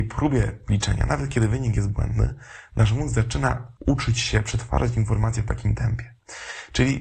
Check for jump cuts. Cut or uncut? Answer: cut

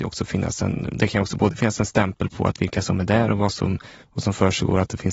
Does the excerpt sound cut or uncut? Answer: uncut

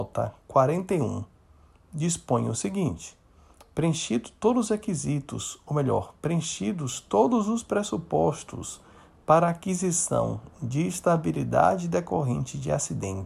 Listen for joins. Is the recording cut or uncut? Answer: uncut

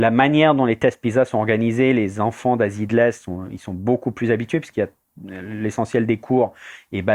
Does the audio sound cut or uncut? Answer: uncut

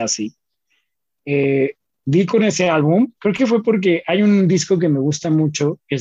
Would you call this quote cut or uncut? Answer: cut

